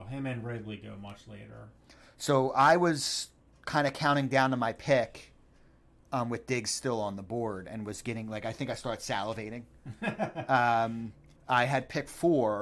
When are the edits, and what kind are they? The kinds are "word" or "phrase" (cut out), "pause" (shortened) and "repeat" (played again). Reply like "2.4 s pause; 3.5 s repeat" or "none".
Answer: 11.4 s pause